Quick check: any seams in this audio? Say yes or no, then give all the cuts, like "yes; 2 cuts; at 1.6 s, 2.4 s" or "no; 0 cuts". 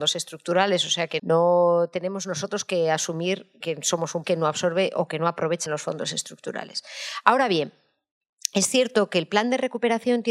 yes; 4 cuts; at 1.2 s, 3.6 s, 4.2 s, 5.7 s